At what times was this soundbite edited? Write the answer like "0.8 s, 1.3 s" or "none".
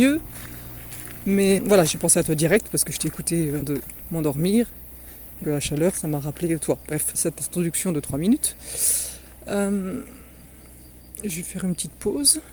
1.6 s, 3.6 s, 5.4 s, 7.1 s